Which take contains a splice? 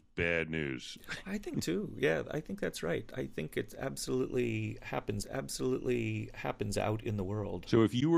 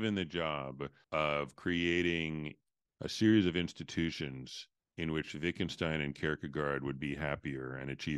first; 2 cuts; at 1.5 s, 5.2 s

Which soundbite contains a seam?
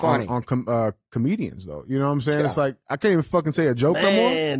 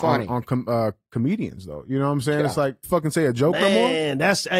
second; 1 cut; at 2.8 s

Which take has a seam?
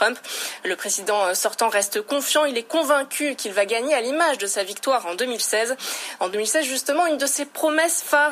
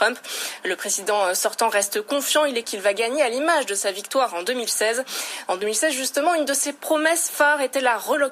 second; 1 cut; at 2.6 s

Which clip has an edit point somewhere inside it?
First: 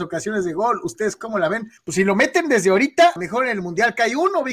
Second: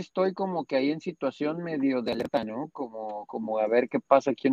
first; 2 cuts; at 1.8 s, 3.2 s

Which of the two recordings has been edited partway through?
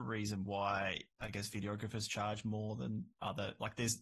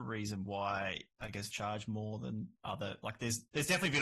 second; 1 cut; at 1.5 s

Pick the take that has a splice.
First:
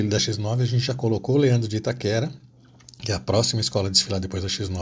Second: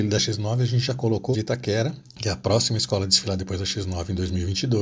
second; 2 cuts; at 1.3 s, 2.1 s

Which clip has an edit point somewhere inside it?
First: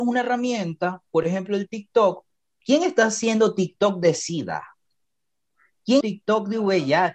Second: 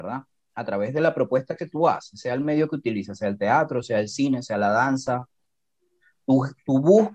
first; 1 cut; at 6.0 s

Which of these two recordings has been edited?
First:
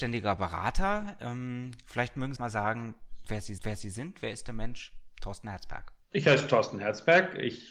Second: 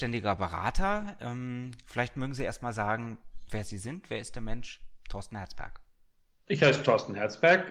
first; 3 cuts; at 2.4 s, 3.6 s, 6.0 s

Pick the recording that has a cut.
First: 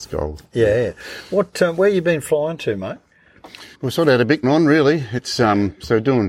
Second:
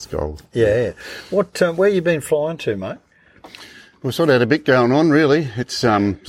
first; 2 cuts; at 3.7 s, 4.4 s

